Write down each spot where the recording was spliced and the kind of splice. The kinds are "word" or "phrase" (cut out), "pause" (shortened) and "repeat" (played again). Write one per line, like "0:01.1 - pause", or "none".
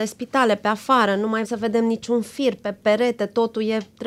0:01.4 - word

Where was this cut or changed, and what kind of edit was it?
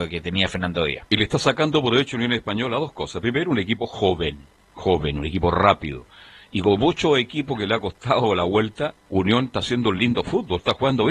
0:09.0 - pause

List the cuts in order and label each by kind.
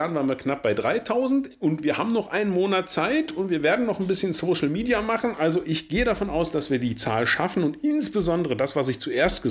none

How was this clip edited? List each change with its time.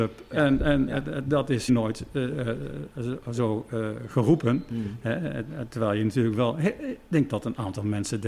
0:01.7 - word

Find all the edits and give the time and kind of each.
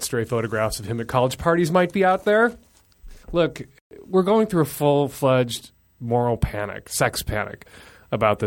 0:03.2 - pause

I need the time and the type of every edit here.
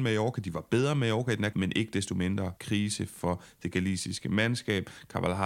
0:01.5 - word
0:02.6 - pause

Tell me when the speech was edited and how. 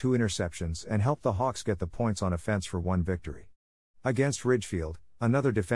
none

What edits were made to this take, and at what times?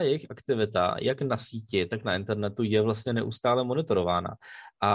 none

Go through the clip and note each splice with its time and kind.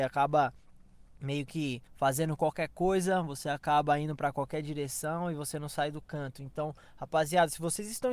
0:01.9 - pause

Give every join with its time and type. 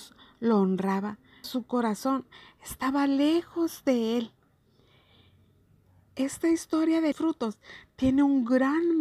0:01.4 - word
0:07.1 - phrase

